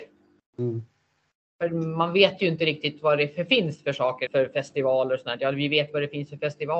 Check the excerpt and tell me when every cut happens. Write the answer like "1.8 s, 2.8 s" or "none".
4.3 s